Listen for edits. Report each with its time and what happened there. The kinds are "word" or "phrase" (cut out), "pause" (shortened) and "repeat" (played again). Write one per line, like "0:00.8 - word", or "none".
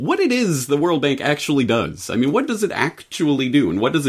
none